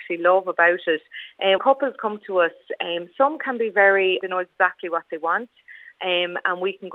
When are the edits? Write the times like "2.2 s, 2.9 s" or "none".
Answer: 1.6 s, 4.2 s